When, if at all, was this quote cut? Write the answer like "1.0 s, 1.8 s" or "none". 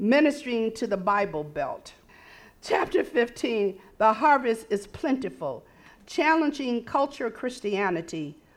none